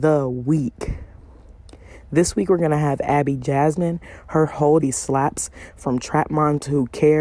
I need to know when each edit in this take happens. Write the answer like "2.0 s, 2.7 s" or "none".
4.8 s